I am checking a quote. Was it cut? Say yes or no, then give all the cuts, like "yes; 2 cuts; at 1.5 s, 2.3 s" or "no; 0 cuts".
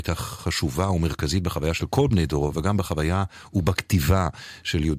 no; 0 cuts